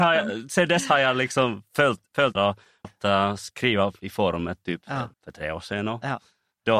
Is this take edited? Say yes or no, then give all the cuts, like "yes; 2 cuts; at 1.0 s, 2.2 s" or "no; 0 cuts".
yes; 3 cuts; at 2.3 s, 2.8 s, 5.1 s